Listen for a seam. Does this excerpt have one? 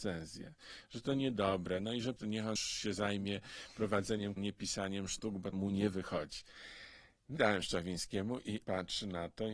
yes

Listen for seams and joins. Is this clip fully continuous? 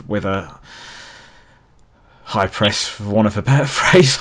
yes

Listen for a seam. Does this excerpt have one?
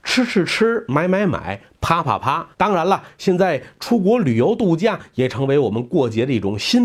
yes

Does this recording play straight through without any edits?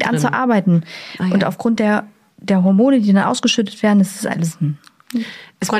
yes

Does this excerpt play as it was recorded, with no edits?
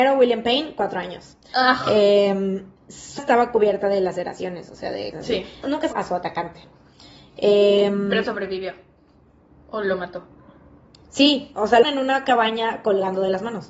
no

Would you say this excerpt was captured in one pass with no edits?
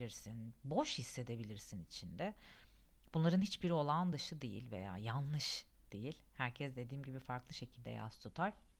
yes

